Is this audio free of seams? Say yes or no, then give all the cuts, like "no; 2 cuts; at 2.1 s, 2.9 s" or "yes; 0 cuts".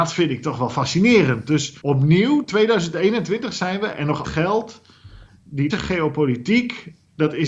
no; 3 cuts; at 1.8 s, 4.2 s, 5.7 s